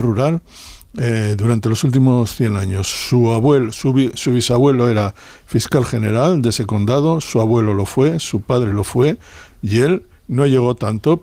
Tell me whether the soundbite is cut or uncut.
uncut